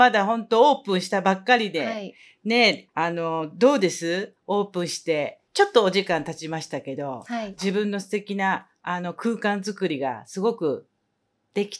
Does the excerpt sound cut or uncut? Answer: cut